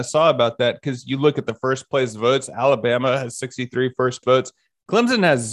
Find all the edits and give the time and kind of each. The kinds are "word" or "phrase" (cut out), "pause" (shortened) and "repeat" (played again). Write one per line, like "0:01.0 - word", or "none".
0:04.2 - word